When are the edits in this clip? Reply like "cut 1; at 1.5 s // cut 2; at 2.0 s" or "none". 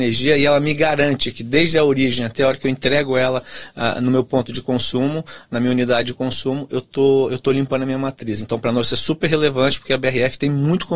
none